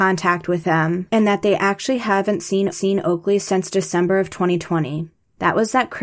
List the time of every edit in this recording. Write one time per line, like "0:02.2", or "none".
0:02.7